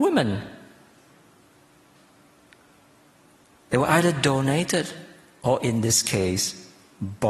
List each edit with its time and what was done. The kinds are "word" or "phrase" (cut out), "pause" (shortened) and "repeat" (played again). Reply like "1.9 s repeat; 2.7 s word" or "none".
none